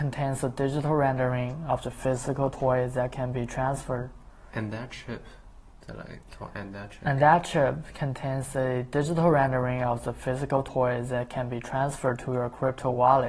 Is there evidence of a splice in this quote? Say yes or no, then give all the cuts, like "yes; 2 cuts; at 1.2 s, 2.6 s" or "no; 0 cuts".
no; 0 cuts